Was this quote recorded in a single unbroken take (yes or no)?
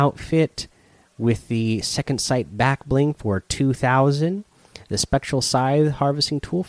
yes